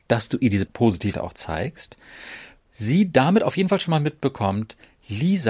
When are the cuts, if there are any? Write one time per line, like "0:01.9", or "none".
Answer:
0:01.1
0:02.6